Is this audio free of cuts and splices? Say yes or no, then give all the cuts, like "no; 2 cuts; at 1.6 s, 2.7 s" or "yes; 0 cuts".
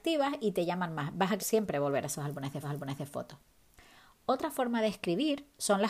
no; 2 cuts; at 1.4 s, 2.6 s